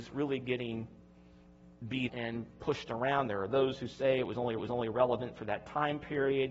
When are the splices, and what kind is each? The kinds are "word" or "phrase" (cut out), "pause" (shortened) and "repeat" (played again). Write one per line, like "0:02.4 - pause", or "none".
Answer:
0:02.1 - word
0:04.6 - repeat